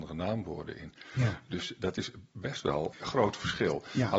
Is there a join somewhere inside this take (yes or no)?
yes